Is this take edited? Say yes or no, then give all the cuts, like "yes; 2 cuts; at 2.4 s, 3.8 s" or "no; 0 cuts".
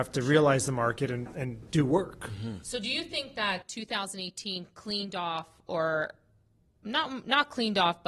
no; 0 cuts